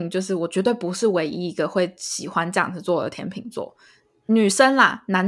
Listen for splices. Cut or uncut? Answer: uncut